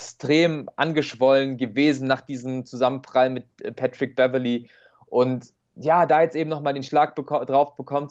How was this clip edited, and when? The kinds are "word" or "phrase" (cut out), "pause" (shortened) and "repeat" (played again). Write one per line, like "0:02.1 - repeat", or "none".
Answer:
none